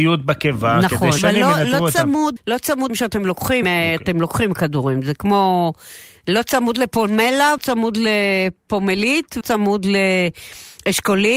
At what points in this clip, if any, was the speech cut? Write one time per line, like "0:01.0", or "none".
0:01.2
0:02.4
0:02.9
0:03.6
0:07.6
0:09.4